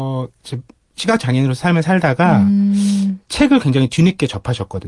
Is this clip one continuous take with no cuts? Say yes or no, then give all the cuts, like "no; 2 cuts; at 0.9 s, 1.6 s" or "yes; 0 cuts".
no; 1 cut; at 3.2 s